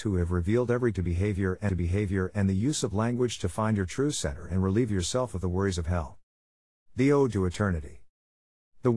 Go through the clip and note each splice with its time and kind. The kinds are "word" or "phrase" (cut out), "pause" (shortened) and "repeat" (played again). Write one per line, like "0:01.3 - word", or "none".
0:00.9 - word
0:01.7 - repeat